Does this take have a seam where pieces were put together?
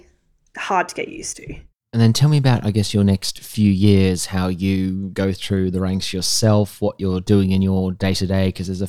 no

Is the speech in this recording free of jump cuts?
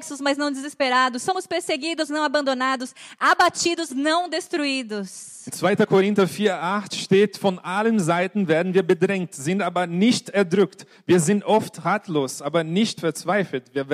no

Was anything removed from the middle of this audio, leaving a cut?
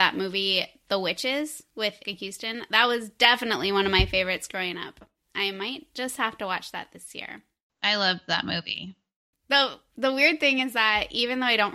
yes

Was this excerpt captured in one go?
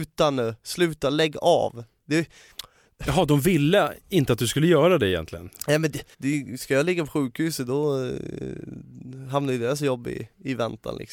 no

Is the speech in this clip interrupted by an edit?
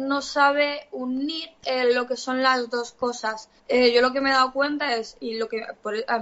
yes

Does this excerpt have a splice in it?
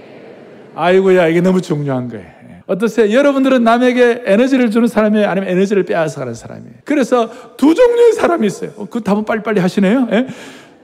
yes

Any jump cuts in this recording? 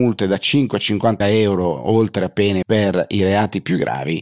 yes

